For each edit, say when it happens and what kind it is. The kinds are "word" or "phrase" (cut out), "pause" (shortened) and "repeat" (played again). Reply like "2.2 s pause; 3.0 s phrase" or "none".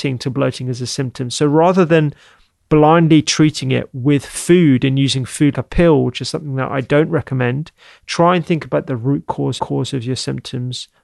5.5 s word; 9.6 s repeat